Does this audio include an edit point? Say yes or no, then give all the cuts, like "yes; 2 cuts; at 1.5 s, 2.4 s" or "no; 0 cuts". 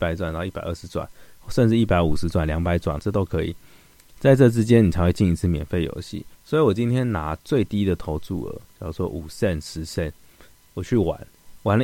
yes; 3 cuts; at 3.0 s, 6.3 s, 8.7 s